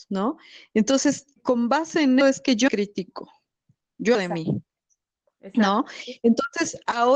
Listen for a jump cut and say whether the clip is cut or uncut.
cut